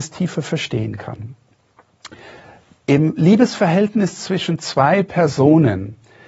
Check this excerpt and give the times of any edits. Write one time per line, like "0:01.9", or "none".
none